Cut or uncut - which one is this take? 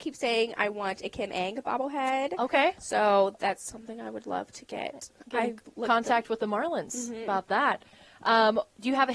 uncut